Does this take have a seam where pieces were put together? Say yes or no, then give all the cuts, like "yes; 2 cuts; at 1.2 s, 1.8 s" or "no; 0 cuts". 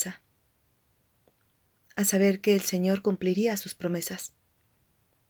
no; 0 cuts